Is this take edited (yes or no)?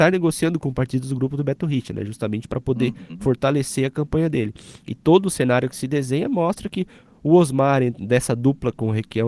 no